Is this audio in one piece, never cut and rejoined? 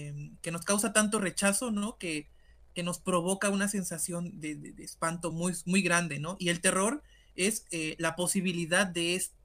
yes; 0 cuts

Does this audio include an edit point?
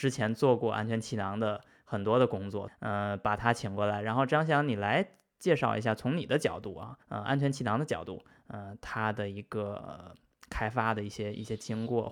yes; 2 cuts; at 2.7 s, 7.0 s

